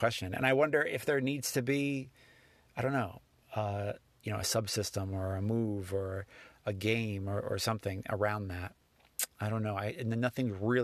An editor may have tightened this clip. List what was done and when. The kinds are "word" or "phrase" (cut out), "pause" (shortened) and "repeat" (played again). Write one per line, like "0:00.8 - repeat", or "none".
none